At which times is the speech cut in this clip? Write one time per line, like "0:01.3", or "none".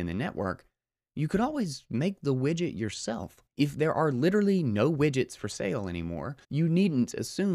0:03.5
0:06.4